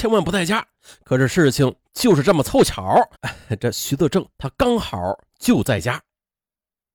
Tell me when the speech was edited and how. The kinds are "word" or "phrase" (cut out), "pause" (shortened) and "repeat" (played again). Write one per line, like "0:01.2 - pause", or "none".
0:03.1 - pause